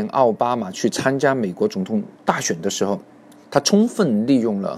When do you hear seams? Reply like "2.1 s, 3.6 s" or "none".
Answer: 2.1 s, 3.1 s